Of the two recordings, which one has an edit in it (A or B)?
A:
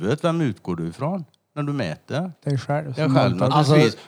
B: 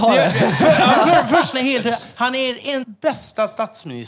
B